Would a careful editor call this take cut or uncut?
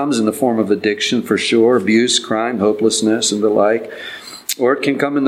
cut